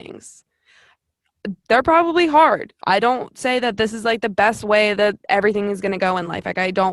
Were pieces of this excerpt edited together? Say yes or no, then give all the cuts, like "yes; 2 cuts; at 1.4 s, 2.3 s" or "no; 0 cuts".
no; 0 cuts